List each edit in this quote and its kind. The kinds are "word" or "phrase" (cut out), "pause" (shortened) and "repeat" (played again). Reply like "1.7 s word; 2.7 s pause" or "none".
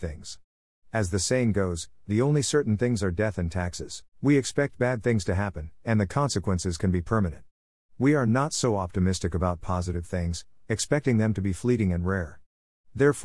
4.1 s pause